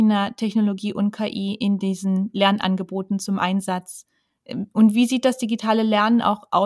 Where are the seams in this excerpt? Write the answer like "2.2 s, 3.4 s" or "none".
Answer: none